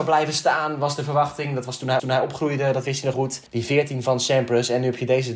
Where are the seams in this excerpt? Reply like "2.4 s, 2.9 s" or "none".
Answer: 2.0 s, 3.1 s, 3.5 s

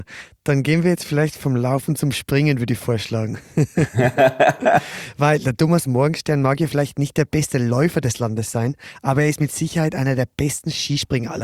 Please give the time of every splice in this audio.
none

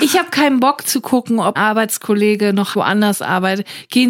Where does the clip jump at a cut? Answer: 1.6 s, 2.7 s

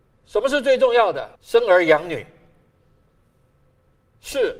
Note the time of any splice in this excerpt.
1.4 s

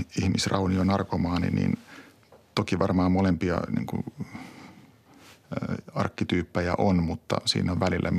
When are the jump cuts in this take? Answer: none

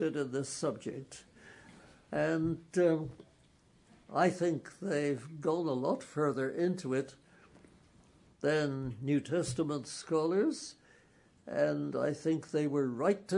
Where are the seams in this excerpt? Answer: none

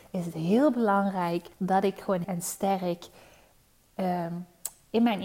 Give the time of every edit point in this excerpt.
1.5 s, 2.2 s

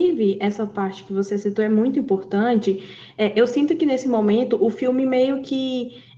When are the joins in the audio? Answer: none

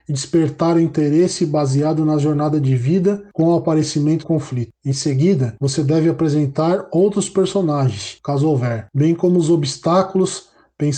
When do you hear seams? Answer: 4.2 s

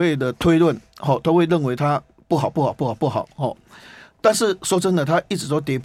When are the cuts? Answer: none

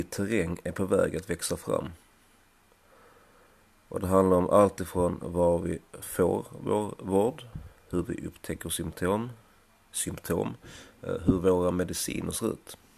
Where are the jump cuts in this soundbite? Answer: none

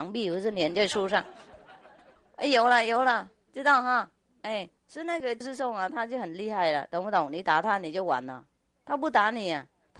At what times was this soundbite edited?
4.8 s

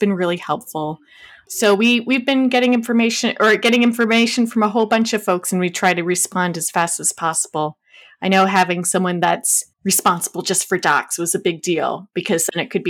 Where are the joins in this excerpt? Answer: 9.7 s

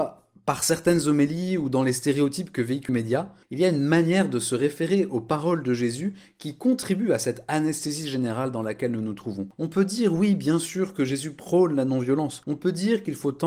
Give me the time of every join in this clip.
2.9 s, 3.4 s

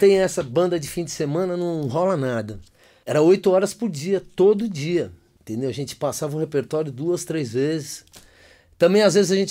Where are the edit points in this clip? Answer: none

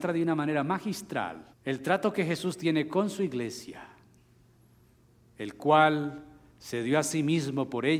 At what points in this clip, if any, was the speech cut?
1.5 s

